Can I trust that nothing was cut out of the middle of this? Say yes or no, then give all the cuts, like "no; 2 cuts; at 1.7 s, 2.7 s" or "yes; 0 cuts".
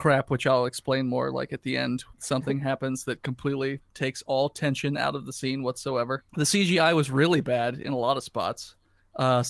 no; 2 cuts; at 2.1 s, 6.3 s